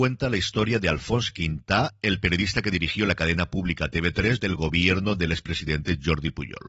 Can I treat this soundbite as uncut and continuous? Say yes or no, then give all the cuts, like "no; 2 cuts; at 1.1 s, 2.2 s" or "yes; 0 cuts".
no; 1 cut; at 4.4 s